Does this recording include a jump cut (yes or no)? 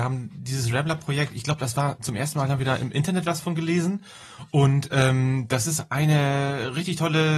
no